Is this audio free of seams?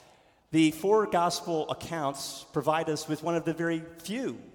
yes; 0 cuts

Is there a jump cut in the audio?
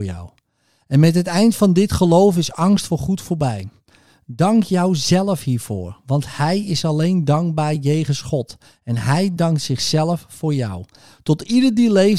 no; 0 cuts

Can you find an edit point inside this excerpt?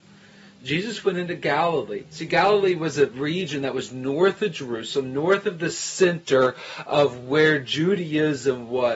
no; 0 cuts

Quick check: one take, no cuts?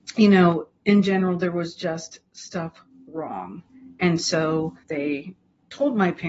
no; 1 cut; at 4.8 s

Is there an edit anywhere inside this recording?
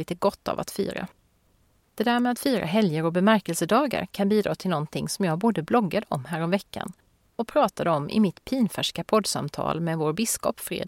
no; 0 cuts

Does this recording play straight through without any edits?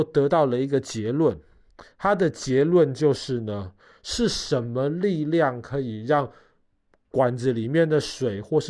yes; 0 cuts

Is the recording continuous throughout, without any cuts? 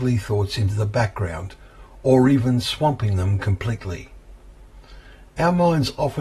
yes; 0 cuts

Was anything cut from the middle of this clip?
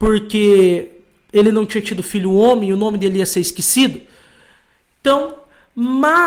no; 0 cuts

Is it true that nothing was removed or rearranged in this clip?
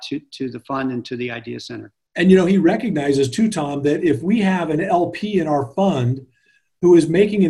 yes; 0 cuts

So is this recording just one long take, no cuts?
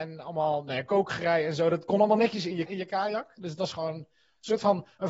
no; 1 cut; at 2.7 s

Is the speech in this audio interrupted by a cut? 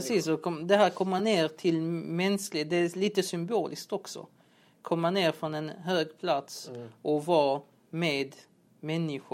no; 0 cuts

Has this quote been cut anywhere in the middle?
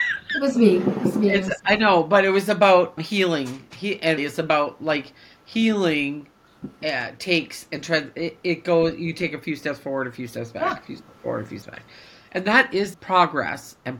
yes; 4 cuts; at 3.0 s, 4.2 s, 11.6 s, 12.9 s

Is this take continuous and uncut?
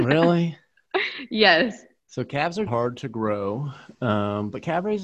no; 1 cut; at 2.7 s

